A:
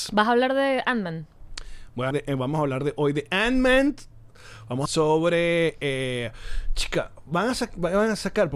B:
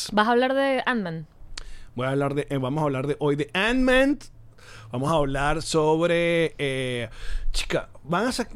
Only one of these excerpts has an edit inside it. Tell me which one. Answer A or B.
A